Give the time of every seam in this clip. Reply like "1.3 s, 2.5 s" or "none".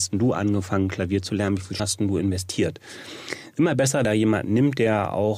1.8 s, 4.0 s